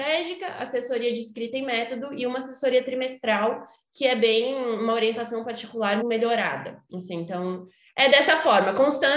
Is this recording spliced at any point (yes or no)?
yes